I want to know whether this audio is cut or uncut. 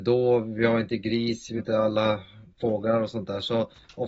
cut